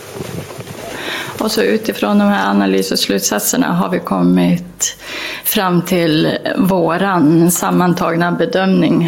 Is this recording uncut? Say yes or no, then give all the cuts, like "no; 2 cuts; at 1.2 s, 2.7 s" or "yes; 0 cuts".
yes; 0 cuts